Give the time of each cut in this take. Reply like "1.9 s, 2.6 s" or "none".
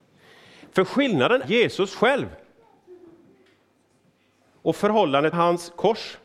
1.4 s, 5.3 s